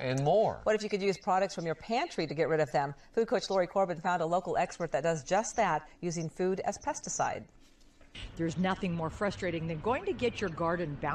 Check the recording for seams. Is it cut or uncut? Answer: uncut